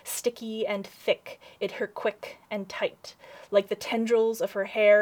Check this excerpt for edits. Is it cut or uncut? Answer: cut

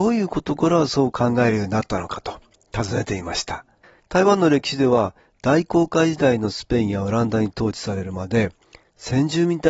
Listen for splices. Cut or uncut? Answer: cut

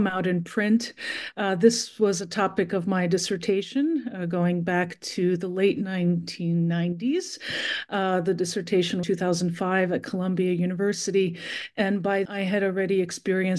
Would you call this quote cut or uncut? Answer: cut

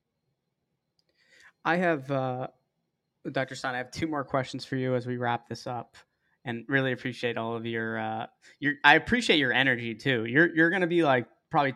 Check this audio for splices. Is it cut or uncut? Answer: uncut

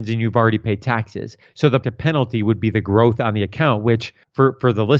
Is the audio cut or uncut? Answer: cut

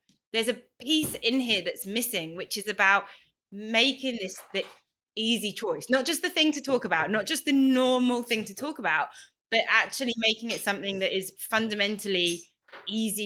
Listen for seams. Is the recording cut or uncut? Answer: uncut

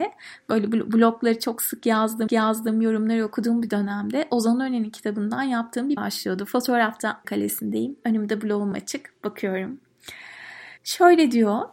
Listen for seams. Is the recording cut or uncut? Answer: cut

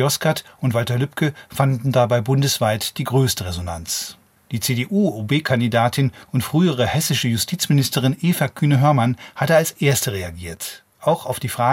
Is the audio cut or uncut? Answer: uncut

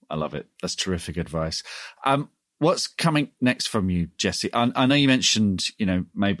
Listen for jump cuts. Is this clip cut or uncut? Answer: uncut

